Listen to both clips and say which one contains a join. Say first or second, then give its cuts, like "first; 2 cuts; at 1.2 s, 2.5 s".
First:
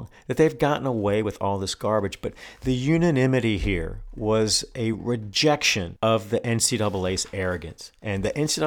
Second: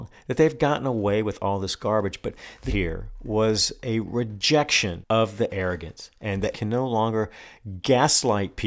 second; 3 cuts; at 2.7 s, 5.5 s, 6.5 s